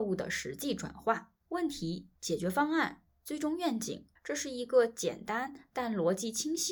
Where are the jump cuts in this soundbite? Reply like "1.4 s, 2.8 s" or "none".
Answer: 1.4 s, 2.2 s, 4.2 s

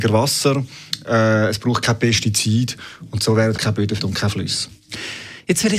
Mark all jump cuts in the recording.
3.6 s, 4.0 s

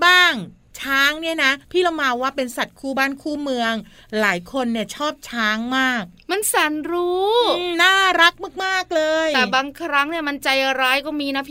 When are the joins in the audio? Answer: 1.6 s

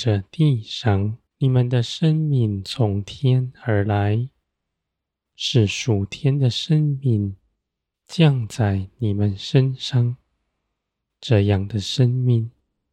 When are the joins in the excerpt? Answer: 1.3 s

